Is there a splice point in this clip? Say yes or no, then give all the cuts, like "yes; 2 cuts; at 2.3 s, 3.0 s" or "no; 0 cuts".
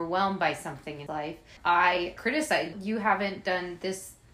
yes; 4 cuts; at 1.1 s, 1.6 s, 2.2 s, 2.7 s